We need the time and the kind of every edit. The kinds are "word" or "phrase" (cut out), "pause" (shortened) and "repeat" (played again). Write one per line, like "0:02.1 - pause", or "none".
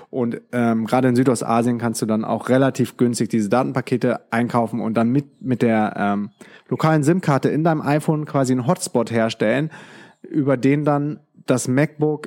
none